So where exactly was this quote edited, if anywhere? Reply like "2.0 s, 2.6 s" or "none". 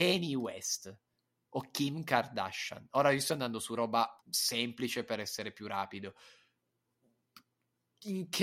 4.2 s